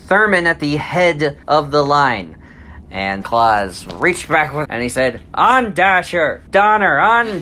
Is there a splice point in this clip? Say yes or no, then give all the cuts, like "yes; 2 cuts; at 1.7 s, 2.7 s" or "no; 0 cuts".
yes; 4 cuts; at 1.4 s, 3.2 s, 4.6 s, 6.5 s